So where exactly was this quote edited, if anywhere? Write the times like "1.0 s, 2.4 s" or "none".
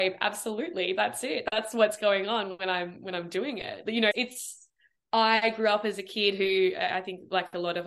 4.1 s